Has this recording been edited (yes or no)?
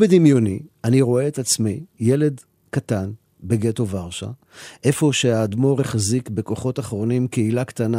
no